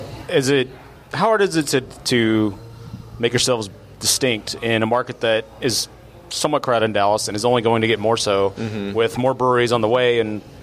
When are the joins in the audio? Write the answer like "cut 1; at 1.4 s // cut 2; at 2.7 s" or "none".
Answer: cut 1; at 1.0 s